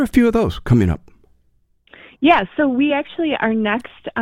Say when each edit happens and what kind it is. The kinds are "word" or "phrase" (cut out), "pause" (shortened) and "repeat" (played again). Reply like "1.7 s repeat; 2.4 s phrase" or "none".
none